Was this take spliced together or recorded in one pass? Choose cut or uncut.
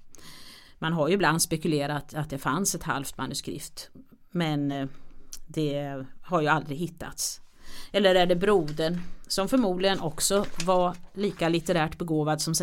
uncut